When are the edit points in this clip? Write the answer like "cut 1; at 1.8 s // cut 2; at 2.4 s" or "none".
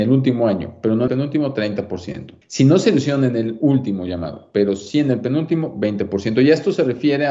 cut 1; at 1.1 s // cut 2; at 2.4 s